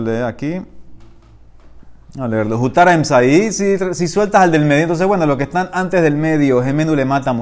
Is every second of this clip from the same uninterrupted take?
yes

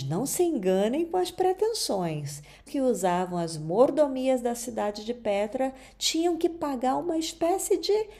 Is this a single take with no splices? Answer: no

